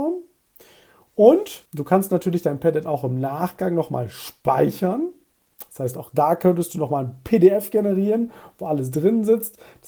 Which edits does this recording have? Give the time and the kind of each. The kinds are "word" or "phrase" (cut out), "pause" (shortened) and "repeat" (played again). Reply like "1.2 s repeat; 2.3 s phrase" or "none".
1.7 s pause